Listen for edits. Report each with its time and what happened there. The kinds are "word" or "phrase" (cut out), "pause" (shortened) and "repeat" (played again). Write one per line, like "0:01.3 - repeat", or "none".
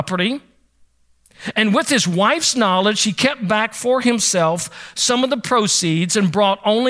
none